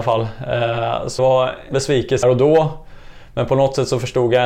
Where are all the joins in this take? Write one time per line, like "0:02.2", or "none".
0:01.2
0:01.7
0:02.2